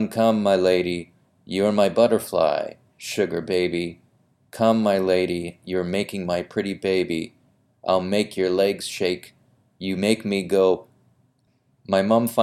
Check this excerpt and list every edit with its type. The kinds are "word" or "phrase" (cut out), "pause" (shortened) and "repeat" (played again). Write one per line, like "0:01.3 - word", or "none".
none